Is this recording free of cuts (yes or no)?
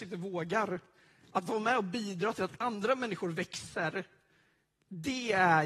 yes